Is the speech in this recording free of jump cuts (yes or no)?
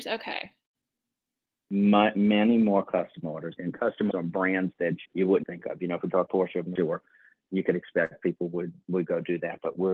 no